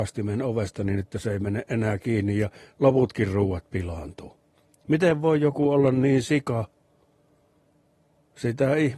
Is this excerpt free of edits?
yes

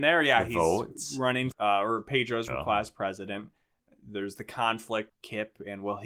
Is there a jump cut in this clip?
yes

